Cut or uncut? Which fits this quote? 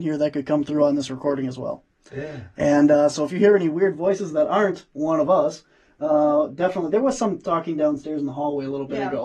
uncut